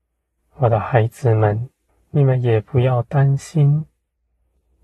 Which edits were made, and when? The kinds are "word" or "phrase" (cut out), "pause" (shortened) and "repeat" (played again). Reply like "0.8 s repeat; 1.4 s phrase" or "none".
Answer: 1.9 s pause